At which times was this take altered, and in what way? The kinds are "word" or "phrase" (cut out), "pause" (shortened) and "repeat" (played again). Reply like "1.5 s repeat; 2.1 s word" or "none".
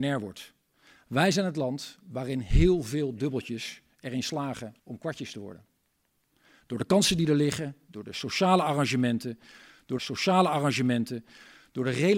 4.8 s pause; 10.0 s repeat